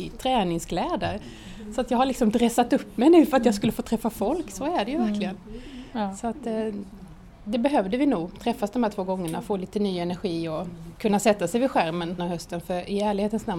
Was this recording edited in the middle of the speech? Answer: yes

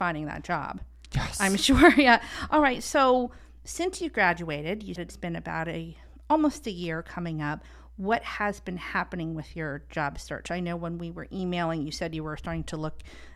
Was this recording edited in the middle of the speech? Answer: yes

